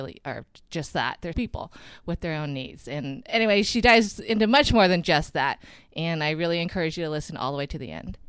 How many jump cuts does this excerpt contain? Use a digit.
1